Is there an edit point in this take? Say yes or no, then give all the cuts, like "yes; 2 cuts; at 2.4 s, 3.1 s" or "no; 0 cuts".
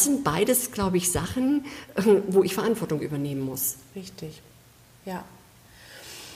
no; 0 cuts